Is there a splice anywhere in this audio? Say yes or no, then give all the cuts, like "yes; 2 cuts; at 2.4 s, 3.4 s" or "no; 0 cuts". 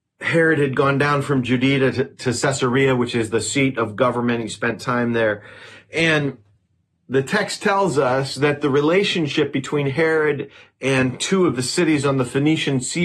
no; 0 cuts